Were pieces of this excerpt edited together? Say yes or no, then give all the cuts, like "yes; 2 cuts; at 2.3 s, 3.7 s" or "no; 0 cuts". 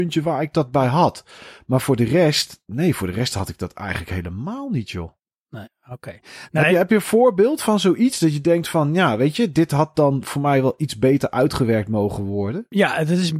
no; 0 cuts